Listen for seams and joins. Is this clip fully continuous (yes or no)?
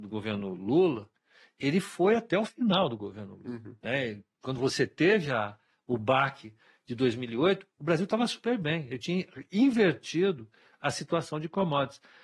yes